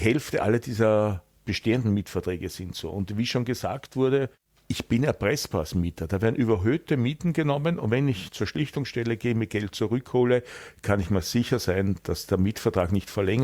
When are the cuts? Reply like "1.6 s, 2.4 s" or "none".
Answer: none